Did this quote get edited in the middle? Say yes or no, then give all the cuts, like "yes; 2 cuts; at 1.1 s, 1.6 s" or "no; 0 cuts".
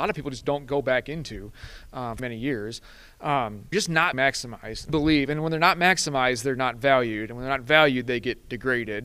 yes; 4 cuts; at 2.2 s, 3.7 s, 4.1 s, 4.9 s